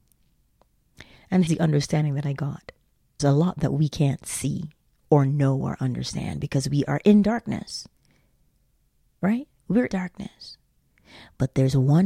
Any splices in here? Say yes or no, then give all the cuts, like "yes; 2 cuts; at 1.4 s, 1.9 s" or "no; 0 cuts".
yes; 3 cuts; at 1.5 s, 3.2 s, 9.9 s